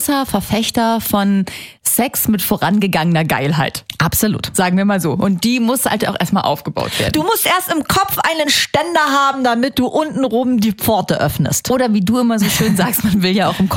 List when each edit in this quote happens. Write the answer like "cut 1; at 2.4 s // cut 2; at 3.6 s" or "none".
none